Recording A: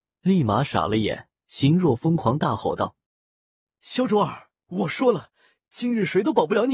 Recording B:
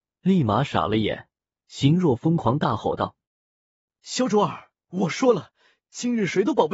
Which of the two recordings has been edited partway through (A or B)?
A